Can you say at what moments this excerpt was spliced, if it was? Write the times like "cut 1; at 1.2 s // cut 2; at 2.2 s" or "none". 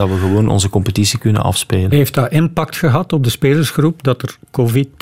none